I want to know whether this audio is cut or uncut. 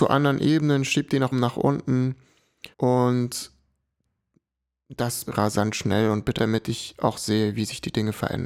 cut